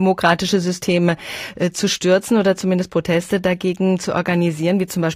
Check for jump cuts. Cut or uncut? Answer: uncut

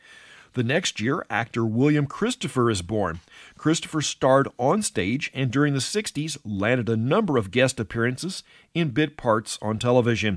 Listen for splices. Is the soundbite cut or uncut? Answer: uncut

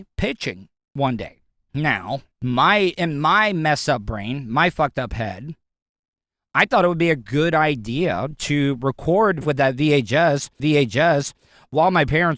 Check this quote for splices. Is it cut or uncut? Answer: cut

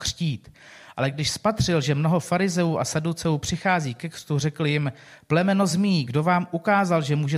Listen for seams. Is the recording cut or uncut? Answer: uncut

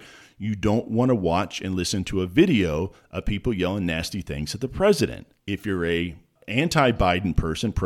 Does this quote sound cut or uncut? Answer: uncut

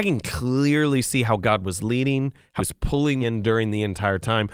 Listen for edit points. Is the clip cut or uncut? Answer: cut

